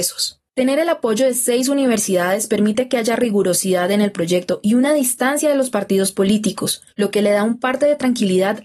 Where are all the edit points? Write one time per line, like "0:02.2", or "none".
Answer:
0:06.9